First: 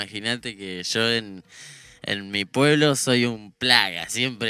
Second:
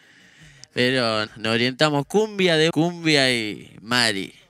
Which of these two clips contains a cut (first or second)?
second